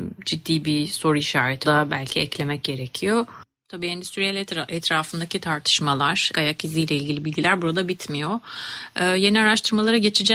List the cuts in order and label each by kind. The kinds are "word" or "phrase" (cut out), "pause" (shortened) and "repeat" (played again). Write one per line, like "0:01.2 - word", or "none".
0:01.6 - word
0:06.3 - word